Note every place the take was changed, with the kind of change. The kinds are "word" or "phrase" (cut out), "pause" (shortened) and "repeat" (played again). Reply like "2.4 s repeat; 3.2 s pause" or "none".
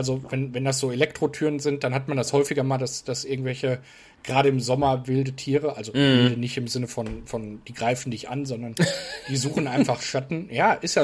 none